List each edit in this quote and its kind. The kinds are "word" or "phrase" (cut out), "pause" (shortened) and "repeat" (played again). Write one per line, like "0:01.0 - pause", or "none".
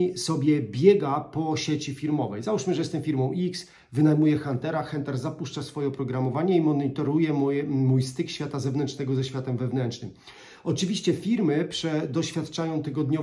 none